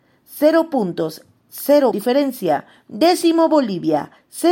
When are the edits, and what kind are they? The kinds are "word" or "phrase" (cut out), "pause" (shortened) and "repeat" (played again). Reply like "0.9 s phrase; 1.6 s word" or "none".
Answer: 1.9 s word